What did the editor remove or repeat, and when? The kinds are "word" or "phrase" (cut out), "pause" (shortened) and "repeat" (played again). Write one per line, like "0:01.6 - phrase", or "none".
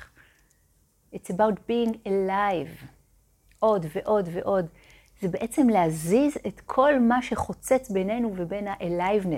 none